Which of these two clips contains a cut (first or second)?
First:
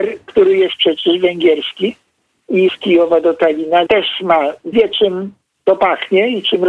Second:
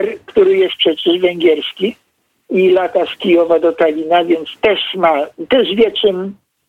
first